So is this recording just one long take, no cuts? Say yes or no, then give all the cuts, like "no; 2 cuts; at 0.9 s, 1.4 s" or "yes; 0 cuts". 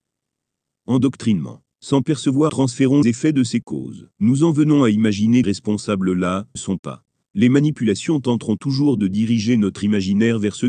no; 8 cuts; at 1.7 s, 2.5 s, 3.0 s, 3.6 s, 4.1 s, 5.4 s, 6.6 s, 7.2 s